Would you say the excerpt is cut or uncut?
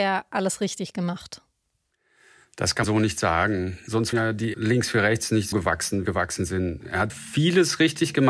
cut